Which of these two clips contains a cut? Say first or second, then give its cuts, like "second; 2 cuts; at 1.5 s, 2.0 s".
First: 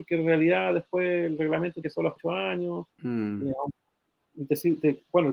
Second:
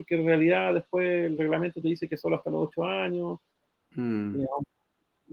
first; 3 cuts; at 1.8 s, 2.2 s, 2.9 s